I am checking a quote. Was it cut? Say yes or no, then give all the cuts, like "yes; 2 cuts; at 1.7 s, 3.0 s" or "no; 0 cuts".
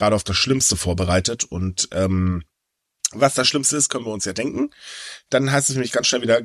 no; 0 cuts